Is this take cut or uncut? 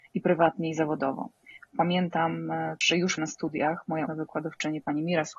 cut